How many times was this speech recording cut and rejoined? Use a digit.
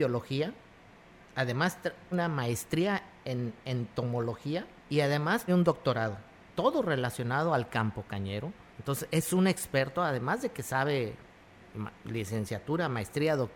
5